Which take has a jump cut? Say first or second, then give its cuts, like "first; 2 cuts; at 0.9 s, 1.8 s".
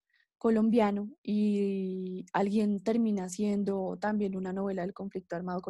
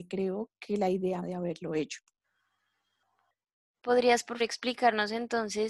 second; 2 cuts; at 1.2 s, 4.4 s